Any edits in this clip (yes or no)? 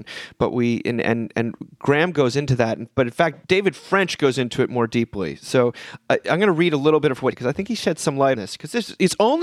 yes